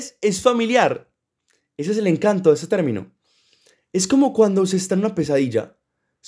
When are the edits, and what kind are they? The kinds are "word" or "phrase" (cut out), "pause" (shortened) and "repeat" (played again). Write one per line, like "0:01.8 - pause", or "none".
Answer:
none